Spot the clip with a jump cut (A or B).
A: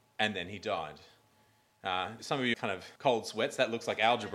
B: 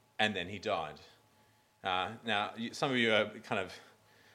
A